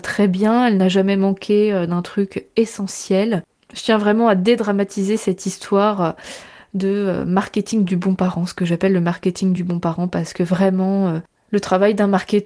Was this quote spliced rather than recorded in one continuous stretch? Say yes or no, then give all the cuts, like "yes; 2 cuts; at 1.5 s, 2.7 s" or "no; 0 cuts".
no; 0 cuts